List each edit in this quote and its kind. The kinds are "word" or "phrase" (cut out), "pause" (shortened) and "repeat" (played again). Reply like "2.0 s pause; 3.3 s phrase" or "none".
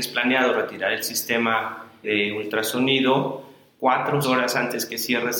2.0 s word; 3.7 s word; 4.2 s word